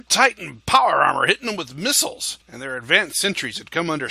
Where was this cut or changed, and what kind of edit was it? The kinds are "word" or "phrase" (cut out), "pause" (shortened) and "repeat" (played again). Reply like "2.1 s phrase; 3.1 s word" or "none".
2.4 s pause